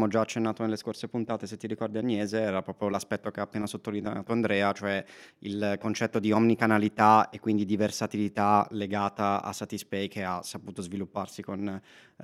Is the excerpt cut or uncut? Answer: uncut